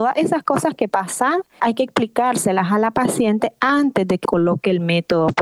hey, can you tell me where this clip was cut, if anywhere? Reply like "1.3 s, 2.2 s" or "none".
0.9 s, 1.6 s, 4.2 s